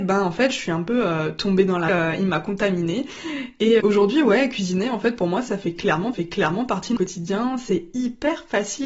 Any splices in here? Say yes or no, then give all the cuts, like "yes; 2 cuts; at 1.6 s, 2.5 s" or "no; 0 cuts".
yes; 4 cuts; at 1.9 s, 3.8 s, 6.1 s, 7.0 s